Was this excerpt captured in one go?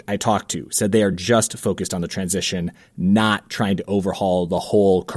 yes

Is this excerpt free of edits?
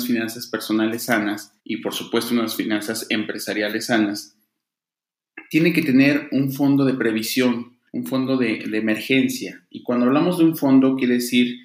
no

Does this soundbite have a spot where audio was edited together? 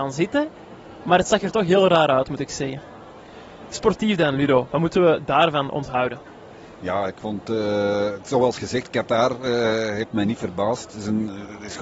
no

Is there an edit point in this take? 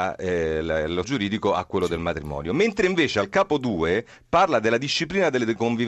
yes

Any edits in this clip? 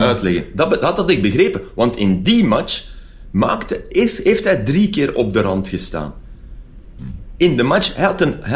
no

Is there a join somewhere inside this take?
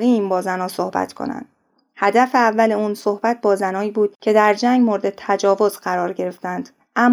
no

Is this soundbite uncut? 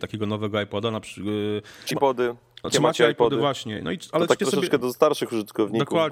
no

